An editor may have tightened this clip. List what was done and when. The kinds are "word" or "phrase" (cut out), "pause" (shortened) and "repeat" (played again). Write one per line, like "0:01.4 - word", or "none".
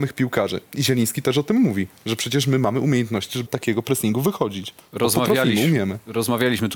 0:03.5 - word